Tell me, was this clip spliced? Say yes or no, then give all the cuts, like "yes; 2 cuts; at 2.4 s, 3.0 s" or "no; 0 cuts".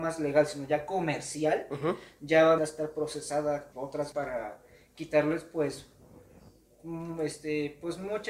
yes; 3 cuts; at 2.6 s, 3.7 s, 4.1 s